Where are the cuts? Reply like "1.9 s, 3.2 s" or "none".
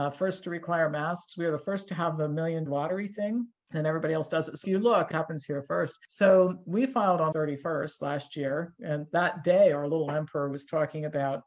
2.7 s, 4.6 s, 5.1 s, 7.3 s